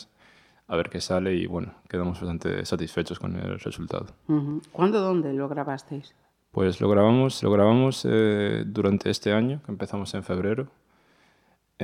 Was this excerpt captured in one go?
no; 1 cut; at 7.4 s

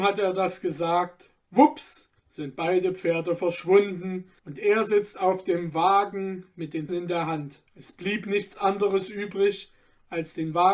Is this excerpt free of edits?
no; 4 cuts; at 2.2 s, 4.4 s, 6.9 s, 7.7 s

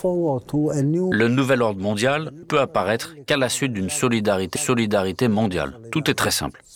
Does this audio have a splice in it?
yes; 2 cuts; at 2.4 s, 4.6 s

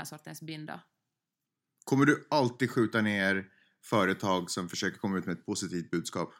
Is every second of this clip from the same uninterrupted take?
yes; 0 cuts

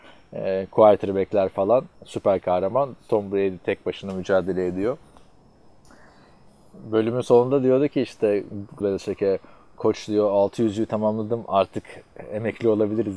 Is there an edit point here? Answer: yes; 2 cuts; at 1.9 s, 8.8 s

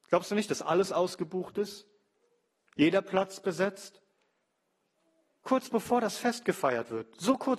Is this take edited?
no; 0 cuts

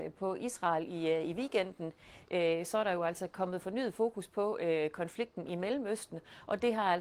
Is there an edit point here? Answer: no; 0 cuts

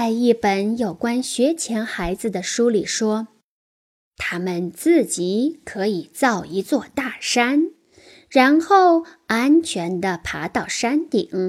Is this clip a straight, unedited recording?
yes; 0 cuts

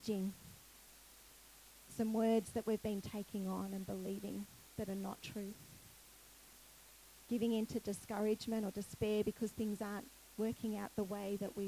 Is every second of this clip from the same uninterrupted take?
yes; 0 cuts

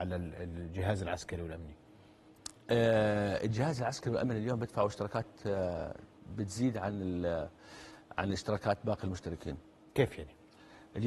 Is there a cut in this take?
no; 0 cuts

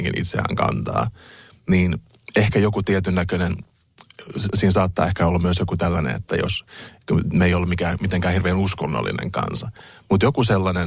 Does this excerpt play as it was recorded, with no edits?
yes; 0 cuts

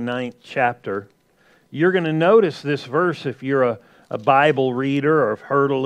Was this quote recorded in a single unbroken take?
yes; 0 cuts

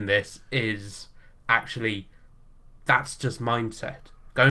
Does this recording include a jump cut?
no; 0 cuts

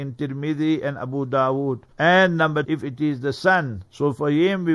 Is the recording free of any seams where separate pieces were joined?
no; 2 cuts; at 1.9 s, 2.6 s

